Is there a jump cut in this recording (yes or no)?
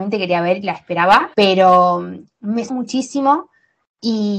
yes